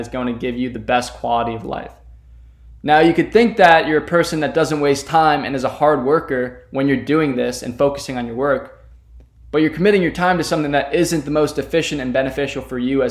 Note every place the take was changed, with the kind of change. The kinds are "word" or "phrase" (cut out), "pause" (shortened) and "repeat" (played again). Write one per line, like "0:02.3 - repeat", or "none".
none